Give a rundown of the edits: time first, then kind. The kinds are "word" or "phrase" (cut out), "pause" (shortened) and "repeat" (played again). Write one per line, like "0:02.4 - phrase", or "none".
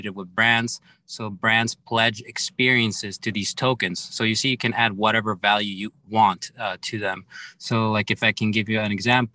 0:06.1 - word